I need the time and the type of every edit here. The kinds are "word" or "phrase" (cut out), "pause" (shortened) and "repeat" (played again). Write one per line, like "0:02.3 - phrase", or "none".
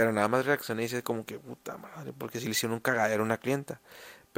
none